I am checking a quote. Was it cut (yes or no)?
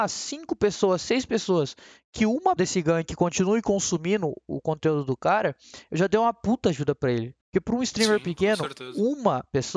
yes